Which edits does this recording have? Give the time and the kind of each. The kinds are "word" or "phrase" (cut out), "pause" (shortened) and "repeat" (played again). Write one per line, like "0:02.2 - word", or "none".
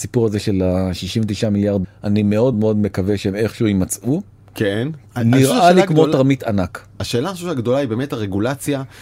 0:01.8 - word
0:02.5 - word